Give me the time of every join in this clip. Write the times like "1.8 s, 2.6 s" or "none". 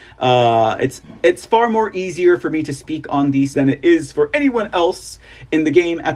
3.5 s